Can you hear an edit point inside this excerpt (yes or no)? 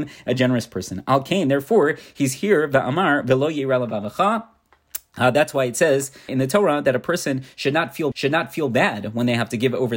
yes